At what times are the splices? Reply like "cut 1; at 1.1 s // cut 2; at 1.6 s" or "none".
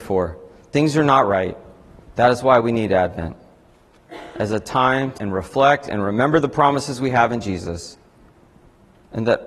cut 1; at 5.2 s